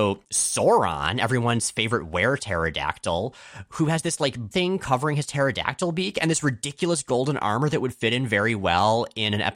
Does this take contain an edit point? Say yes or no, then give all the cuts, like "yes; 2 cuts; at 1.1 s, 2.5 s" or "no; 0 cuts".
yes; 1 cut; at 4.5 s